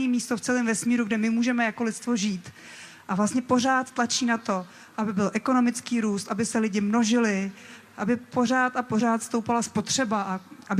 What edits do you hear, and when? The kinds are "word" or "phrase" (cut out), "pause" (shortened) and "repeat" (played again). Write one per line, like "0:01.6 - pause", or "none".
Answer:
none